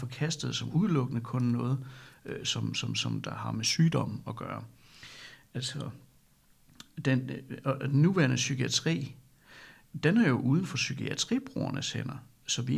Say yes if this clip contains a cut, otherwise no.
no